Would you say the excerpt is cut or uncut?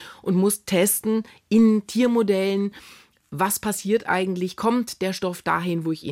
uncut